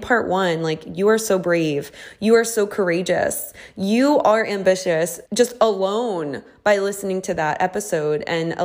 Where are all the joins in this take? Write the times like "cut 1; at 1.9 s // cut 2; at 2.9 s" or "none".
cut 1; at 5.2 s